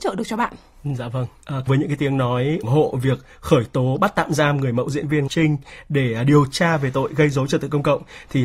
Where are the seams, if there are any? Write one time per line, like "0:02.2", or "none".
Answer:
0:01.7
0:02.6
0:05.3